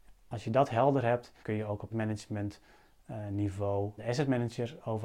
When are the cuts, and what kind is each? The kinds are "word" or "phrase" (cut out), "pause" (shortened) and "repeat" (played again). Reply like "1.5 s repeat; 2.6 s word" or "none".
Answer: 1.4 s word; 1.9 s word; 4.0 s word